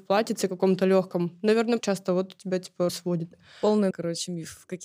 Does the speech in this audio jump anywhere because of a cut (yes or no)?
yes